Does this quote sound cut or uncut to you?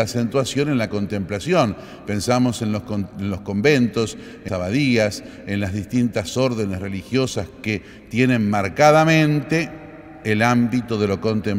cut